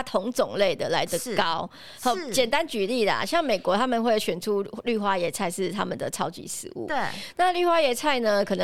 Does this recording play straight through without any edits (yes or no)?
yes